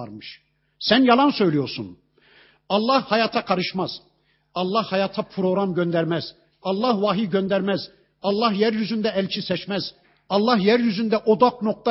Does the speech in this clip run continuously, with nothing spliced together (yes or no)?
yes